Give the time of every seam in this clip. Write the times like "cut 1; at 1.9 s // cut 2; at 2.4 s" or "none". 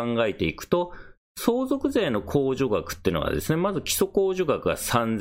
none